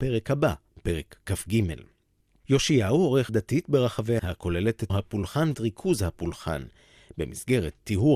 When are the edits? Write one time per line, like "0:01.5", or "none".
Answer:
0:03.3
0:04.2
0:04.9
0:05.5